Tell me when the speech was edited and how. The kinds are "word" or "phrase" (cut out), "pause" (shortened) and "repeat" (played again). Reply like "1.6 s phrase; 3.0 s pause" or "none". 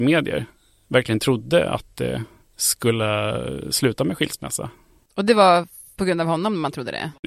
none